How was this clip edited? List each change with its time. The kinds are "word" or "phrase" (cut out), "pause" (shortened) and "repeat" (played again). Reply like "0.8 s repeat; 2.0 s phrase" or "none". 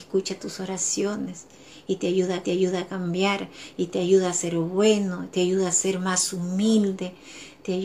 2.4 s repeat